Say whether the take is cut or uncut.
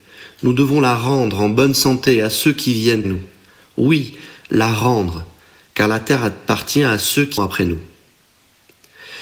cut